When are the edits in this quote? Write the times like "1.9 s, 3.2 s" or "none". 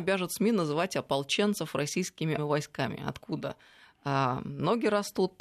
2.4 s